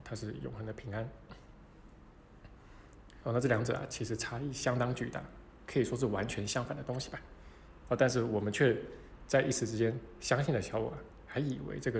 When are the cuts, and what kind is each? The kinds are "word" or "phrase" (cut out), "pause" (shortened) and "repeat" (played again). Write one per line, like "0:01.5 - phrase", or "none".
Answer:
none